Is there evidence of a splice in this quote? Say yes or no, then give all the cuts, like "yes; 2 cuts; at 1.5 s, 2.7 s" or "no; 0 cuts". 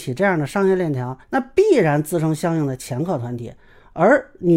yes; 1 cut; at 1.2 s